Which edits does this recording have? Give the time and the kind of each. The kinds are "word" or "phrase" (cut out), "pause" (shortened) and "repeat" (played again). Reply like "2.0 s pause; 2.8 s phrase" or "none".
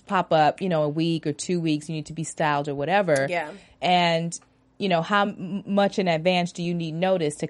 none